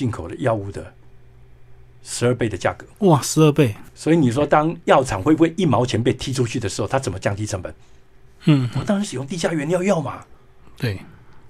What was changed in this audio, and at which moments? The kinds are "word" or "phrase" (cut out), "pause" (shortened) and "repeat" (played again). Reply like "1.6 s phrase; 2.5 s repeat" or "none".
2.9 s pause